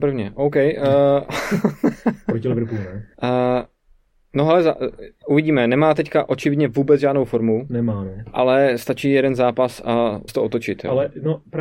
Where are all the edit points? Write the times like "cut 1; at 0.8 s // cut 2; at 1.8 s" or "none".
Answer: cut 1; at 3.1 s // cut 2; at 10.3 s